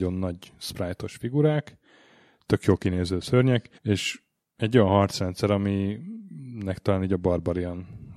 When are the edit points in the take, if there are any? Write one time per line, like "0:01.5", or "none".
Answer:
0:03.8